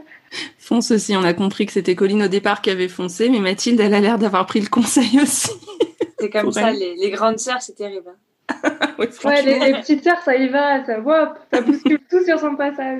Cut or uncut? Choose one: uncut